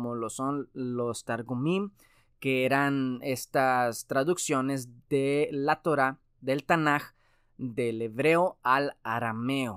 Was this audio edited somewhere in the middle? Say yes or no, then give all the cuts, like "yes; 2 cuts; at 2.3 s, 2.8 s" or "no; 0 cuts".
no; 0 cuts